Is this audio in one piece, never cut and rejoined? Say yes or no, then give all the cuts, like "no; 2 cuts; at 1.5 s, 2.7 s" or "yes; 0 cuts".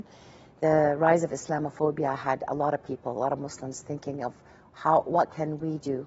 yes; 0 cuts